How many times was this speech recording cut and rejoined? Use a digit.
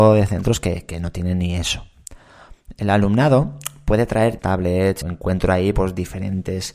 2